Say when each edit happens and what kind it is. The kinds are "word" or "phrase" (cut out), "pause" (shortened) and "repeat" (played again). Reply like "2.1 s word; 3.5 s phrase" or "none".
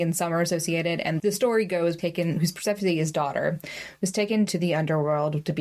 1.2 s word; 2.0 s phrase; 3.1 s word; 4.5 s word